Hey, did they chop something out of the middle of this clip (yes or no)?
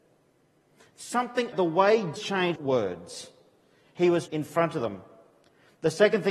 yes